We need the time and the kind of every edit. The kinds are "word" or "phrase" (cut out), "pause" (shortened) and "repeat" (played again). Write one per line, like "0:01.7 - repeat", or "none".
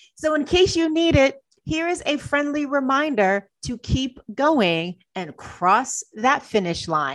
none

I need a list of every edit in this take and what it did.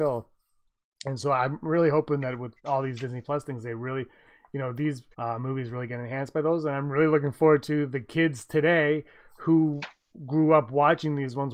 0:02.6 - pause
0:05.1 - pause

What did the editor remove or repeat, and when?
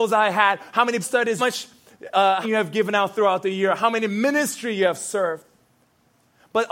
0:01.0 - word
0:01.4 - phrase
0:02.4 - phrase

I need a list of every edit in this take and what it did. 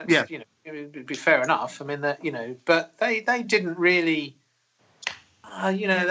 none

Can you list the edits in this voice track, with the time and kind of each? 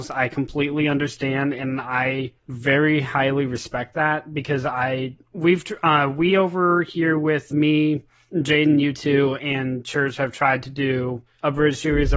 0:02.4 - pause
0:07.5 - word

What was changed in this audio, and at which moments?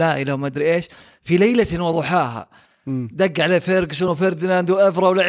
none

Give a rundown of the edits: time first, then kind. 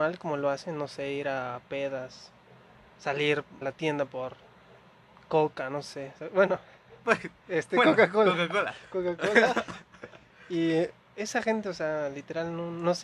0:03.6 - word

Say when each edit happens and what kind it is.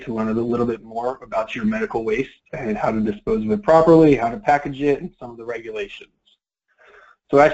none

